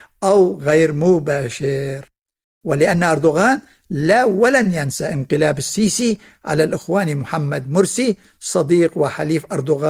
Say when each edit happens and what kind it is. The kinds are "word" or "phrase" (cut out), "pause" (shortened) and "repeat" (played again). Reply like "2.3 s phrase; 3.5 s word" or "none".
none